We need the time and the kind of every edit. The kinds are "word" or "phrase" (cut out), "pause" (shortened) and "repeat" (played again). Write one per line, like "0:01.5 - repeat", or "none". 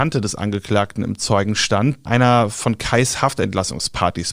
0:02.1 - phrase